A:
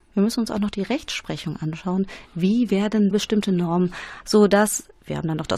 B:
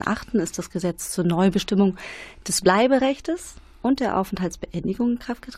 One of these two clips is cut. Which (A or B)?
A